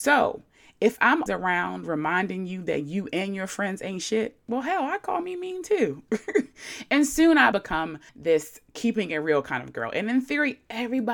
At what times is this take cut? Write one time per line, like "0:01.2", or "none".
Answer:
0:01.3
0:07.5
0:08.1